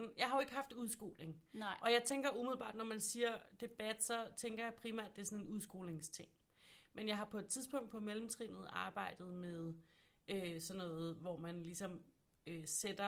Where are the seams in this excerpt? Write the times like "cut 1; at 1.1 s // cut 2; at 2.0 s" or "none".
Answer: none